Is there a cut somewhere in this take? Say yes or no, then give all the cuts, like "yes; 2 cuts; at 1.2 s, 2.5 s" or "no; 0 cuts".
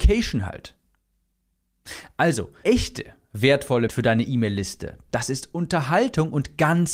yes; 2 cuts; at 2.6 s, 3.9 s